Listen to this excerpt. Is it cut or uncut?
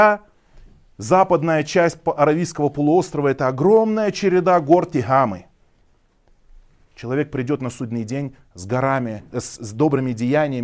uncut